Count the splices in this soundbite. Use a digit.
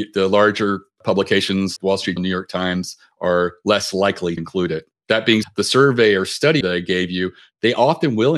5